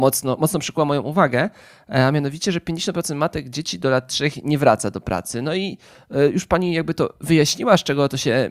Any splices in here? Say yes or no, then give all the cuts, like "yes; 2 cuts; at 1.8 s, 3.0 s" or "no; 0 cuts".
no; 0 cuts